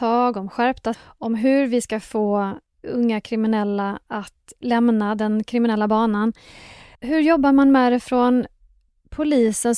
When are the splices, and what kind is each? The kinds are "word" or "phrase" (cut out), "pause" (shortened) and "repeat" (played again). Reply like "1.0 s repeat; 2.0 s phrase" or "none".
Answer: 0.9 s word